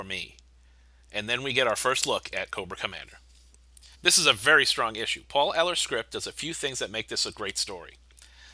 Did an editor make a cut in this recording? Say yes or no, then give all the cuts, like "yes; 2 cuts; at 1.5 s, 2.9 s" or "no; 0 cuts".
yes; 1 cut; at 3.9 s